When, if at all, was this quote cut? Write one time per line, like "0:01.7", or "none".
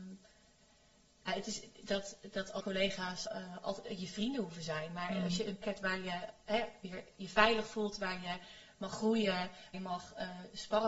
0:01.3
0:01.8
0:02.6
0:03.3
0:05.6
0:09.7